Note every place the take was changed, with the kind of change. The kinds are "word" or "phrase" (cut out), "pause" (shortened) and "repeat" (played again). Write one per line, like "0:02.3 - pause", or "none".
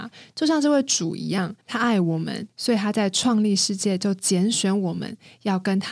0:01.6 - pause
0:02.5 - pause

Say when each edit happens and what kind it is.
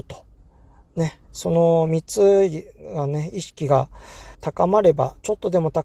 0:01.2 - pause
0:04.3 - pause

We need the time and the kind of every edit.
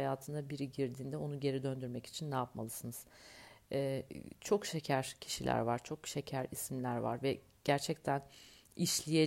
none

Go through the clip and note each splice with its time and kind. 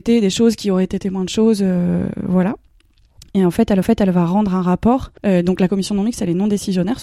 0:03.8 - repeat
0:05.2 - pause

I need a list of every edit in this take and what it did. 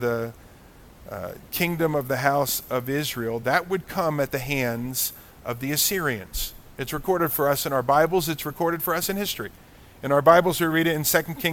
none

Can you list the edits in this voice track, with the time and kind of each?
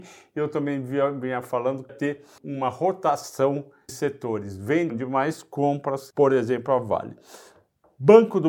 0:01.9 - word
0:02.4 - word
0:03.9 - word
0:04.9 - phrase
0:06.1 - phrase

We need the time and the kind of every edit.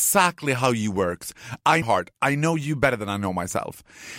0:01.8 - phrase

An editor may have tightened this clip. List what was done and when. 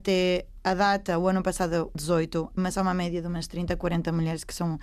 0:01.9 - word

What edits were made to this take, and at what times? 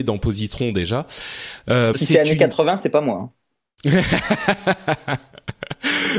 0:01.9 - word

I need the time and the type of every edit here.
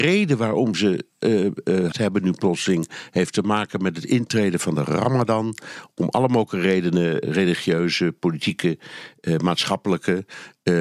0:01.9 - word
0:07.2 - word

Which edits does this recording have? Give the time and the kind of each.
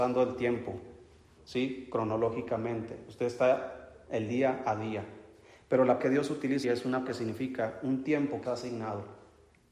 0:01.4 - word
0:04.1 - word
0:06.0 - word
0:06.6 - word
0:07.1 - word
0:08.4 - word

